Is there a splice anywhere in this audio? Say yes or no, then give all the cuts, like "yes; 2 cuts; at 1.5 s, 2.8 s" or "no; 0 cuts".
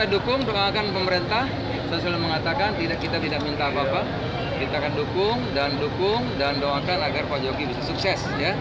yes; 2 cuts; at 3.2 s, 5.8 s